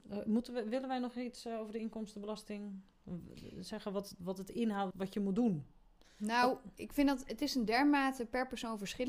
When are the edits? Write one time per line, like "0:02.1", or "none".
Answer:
0:04.9